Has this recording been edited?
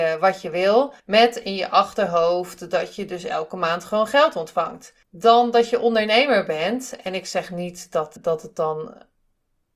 yes; 3 cuts; at 1.0 s, 5.0 s, 8.2 s

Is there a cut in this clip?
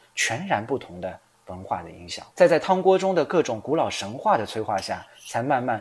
yes; 1 cut; at 2.3 s

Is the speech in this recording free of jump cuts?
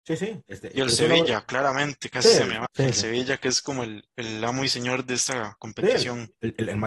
no; 1 cut; at 2.7 s

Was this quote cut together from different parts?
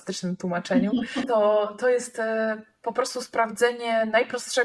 no; 0 cuts

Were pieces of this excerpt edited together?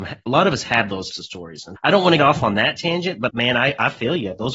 yes; 4 cuts; at 1.1 s, 1.8 s, 2.2 s, 3.3 s

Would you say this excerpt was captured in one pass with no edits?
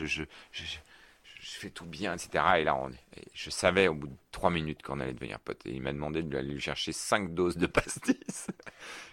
yes; 0 cuts

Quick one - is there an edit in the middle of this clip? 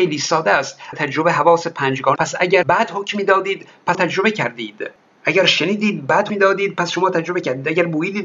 yes; 5 cuts; at 0.9 s, 2.2 s, 2.6 s, 3.9 s, 6.3 s

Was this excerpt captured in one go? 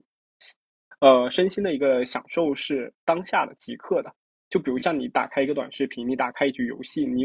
yes; 0 cuts

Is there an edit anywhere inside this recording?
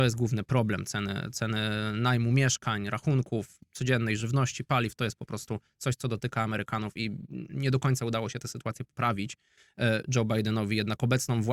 no; 0 cuts

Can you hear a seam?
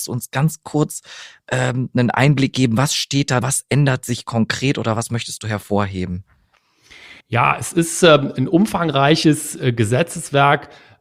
yes; 2 cuts; at 3.4 s, 7.2 s

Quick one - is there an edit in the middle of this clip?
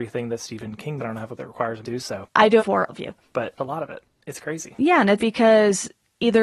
yes; 7 cuts; at 1.0 s, 1.4 s, 1.8 s, 2.6 s, 2.9 s, 3.6 s, 5.2 s

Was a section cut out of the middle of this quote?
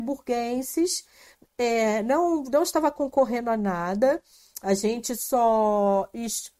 no; 0 cuts

